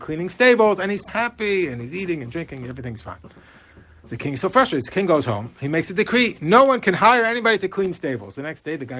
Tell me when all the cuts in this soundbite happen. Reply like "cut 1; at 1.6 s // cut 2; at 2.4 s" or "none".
cut 1; at 1.1 s